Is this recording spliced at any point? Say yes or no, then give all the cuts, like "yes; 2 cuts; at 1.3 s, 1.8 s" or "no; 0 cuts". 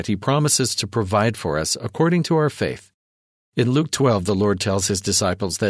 no; 0 cuts